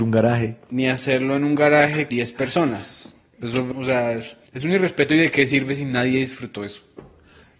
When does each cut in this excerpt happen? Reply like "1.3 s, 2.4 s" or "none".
2.1 s, 3.7 s, 4.5 s